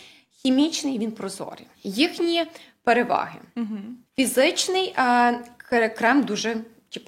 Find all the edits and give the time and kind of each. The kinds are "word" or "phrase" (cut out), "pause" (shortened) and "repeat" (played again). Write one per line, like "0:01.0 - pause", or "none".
0:01.7 - pause
0:04.1 - pause